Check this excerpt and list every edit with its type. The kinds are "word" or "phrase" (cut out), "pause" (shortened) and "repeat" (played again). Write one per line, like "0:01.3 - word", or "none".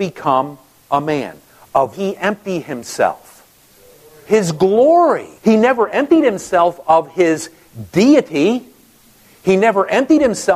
0:01.9 - phrase
0:03.7 - pause
0:05.4 - pause